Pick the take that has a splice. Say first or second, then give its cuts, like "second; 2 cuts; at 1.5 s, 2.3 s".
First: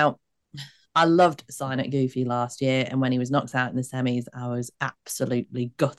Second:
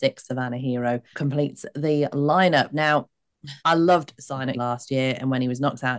second; 3 cuts; at 1.1 s, 3.6 s, 4.5 s